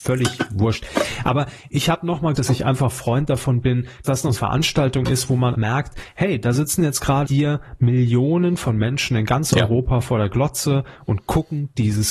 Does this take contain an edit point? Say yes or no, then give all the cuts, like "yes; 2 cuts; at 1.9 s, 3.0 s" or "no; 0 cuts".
yes; 5 cuts; at 2.3 s, 4.0 s, 4.3 s, 5.5 s, 7.2 s